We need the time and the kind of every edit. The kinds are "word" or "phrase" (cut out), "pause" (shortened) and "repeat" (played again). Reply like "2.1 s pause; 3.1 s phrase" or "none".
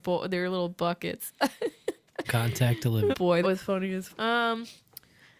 2.2 s word; 3.1 s word; 3.4 s word; 4.1 s word